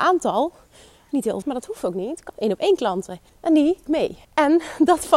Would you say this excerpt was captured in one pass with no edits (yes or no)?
no